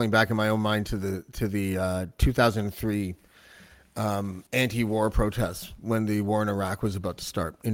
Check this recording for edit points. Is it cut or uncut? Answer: cut